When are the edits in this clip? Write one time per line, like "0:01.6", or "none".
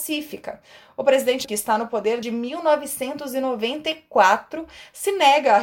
0:01.4
0:02.2